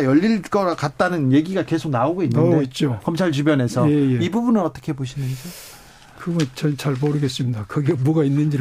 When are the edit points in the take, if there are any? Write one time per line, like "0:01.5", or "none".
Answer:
none